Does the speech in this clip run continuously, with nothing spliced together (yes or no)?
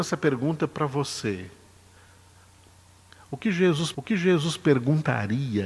no